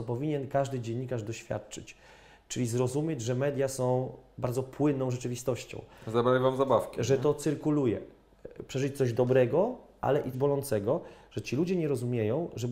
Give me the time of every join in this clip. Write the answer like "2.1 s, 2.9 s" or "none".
10.3 s